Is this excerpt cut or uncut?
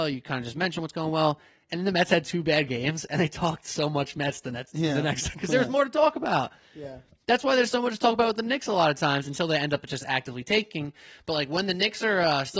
cut